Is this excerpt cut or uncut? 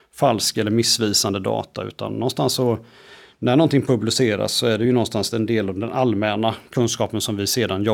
uncut